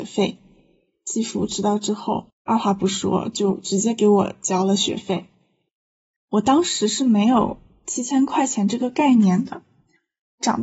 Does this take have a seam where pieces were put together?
yes; 1 cut; at 2.4 s

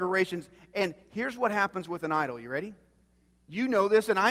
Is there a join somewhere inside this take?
no; 0 cuts

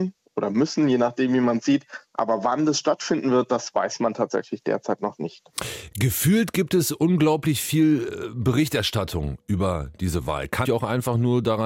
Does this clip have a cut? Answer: yes; 1 cut; at 10.6 s

